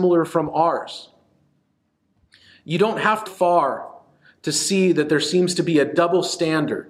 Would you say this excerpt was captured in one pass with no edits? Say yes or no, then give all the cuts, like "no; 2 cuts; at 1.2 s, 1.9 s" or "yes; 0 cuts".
no; 1 cut; at 3.3 s